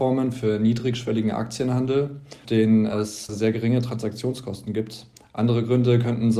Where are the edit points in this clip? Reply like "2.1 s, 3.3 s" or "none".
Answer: 2.4 s, 3.3 s